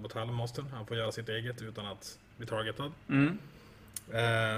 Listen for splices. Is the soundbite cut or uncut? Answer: uncut